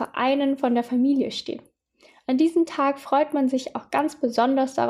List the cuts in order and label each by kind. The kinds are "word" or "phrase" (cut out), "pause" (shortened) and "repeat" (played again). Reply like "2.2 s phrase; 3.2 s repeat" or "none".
none